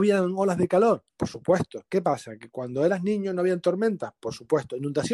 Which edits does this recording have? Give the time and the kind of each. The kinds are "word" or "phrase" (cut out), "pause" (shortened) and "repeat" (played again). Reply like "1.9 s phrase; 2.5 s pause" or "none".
1.1 s pause

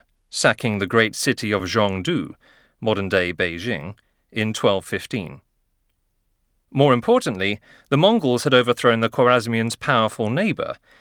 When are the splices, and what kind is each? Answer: none

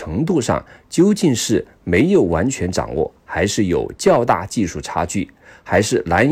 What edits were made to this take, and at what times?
none

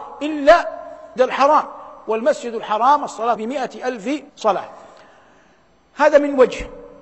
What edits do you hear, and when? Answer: 1.2 s word; 3.4 s word; 4.3 s pause

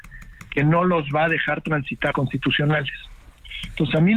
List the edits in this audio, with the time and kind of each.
2.1 s word

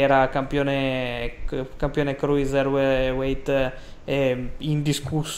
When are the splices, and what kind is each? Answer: none

